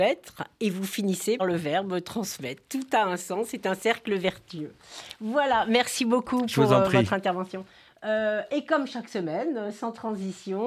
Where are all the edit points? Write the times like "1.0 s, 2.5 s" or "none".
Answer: 1.4 s